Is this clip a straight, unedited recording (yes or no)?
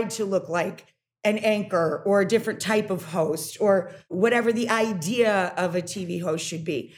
yes